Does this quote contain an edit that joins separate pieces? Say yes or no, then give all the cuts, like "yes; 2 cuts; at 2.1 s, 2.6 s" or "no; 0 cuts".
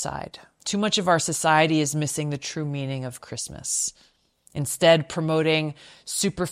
no; 0 cuts